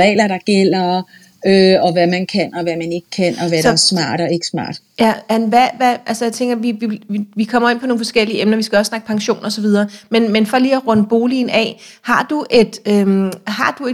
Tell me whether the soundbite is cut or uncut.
uncut